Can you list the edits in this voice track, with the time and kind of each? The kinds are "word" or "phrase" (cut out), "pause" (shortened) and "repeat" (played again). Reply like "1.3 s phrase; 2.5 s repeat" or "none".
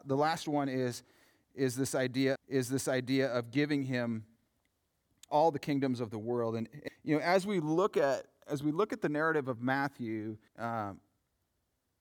2.4 s repeat; 5.3 s word; 6.9 s word; 10.5 s pause